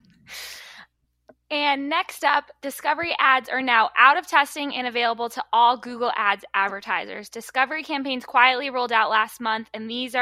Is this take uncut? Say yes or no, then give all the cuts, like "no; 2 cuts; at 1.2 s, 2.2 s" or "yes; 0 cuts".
yes; 0 cuts